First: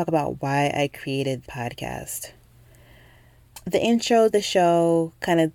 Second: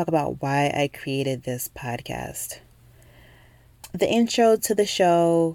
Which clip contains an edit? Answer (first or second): first